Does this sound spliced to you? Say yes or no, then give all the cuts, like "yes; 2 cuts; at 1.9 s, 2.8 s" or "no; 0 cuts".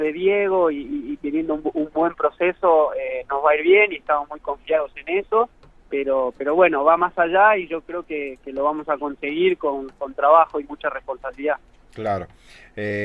no; 0 cuts